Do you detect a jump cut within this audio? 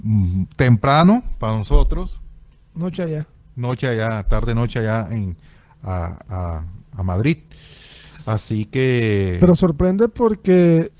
no; 0 cuts

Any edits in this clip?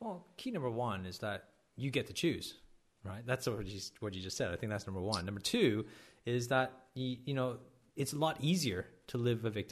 no; 0 cuts

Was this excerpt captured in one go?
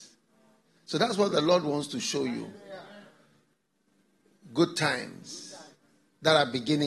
yes; 0 cuts

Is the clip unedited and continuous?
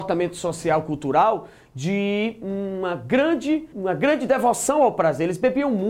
no; 1 cut; at 3.7 s

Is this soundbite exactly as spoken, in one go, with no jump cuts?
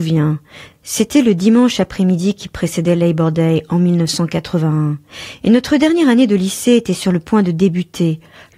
yes; 0 cuts

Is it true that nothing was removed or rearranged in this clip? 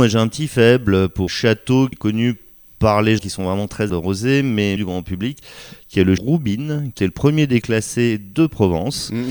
no; 8 cuts; at 1.3 s, 1.9 s, 3.2 s, 3.9 s, 4.8 s, 6.2 s, 7.0 s, 7.6 s

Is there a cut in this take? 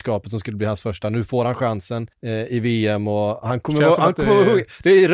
yes; 1 cut; at 2.1 s

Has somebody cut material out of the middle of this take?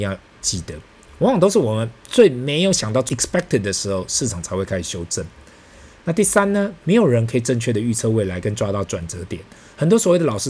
yes; 1 cut; at 3.1 s

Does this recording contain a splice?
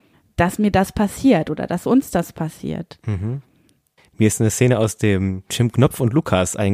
no; 0 cuts

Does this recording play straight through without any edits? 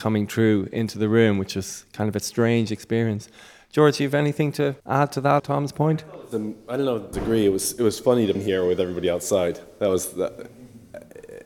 no; 4 cuts; at 4.8 s, 5.4 s, 7.1 s, 8.3 s

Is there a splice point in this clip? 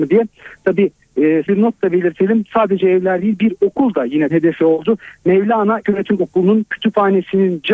yes; 3 cuts; at 1.5 s, 4.3 s, 5.8 s

